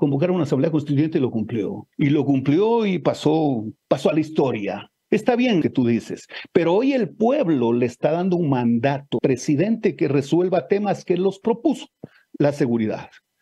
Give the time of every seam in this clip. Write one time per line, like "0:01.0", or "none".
0:01.9
0:03.8
0:05.6
0:09.2